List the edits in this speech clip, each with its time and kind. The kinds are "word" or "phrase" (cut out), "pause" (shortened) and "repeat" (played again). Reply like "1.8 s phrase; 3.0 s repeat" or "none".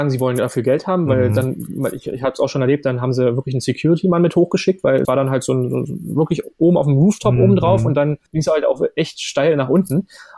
5.0 s word; 8.3 s pause